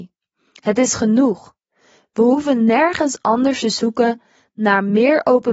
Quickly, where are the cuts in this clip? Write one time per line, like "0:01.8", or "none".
none